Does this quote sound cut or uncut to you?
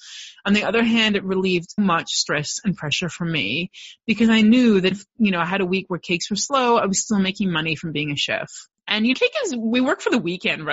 cut